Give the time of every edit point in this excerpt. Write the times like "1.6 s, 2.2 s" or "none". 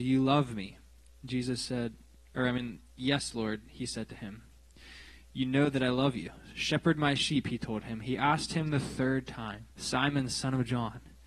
9.7 s